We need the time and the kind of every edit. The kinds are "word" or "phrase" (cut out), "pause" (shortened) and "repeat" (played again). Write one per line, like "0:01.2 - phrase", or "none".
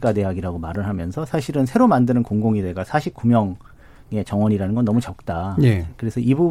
none